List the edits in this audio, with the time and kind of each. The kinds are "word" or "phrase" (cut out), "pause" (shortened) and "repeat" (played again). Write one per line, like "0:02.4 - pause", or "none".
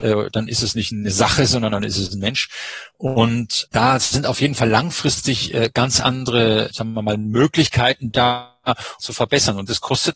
0:03.7 - word
0:09.0 - phrase